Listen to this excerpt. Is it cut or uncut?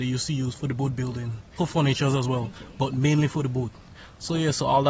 uncut